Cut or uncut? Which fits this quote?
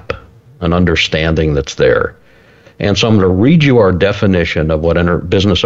uncut